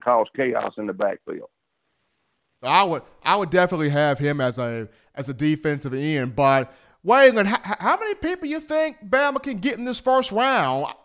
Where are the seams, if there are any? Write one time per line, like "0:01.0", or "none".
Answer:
none